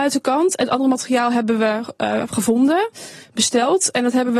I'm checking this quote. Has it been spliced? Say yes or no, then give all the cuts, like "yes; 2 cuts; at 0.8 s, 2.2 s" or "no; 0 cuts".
no; 0 cuts